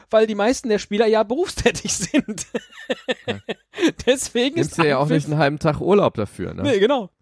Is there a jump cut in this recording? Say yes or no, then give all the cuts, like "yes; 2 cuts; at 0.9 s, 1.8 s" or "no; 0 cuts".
no; 0 cuts